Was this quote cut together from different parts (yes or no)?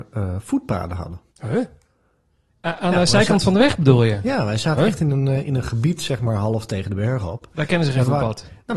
yes